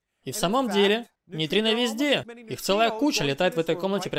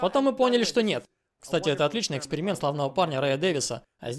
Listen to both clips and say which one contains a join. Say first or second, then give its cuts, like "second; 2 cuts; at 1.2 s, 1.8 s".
first; 1 cut; at 1.2 s